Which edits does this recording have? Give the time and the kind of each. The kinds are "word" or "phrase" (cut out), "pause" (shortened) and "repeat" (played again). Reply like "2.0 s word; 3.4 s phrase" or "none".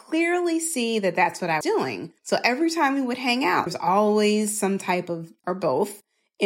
1.6 s word; 2.2 s pause; 3.7 s word; 5.4 s phrase